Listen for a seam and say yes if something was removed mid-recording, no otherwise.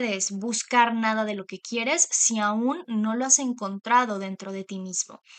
no